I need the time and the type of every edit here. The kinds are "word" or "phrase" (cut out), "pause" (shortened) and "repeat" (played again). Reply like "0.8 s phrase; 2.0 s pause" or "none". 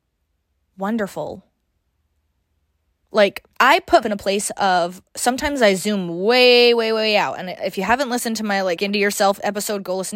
3.5 s pause; 4.0 s word; 8.8 s phrase